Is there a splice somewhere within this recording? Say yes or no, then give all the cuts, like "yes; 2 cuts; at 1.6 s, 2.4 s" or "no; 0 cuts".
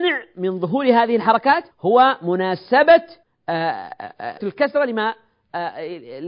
yes; 3 cuts; at 1.7 s, 3.2 s, 4.4 s